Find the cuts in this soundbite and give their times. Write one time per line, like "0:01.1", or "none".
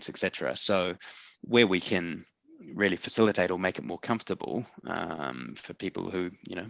none